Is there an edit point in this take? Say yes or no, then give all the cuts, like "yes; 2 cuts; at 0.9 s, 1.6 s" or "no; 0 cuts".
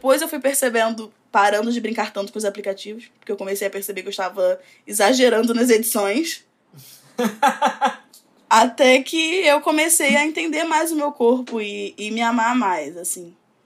no; 0 cuts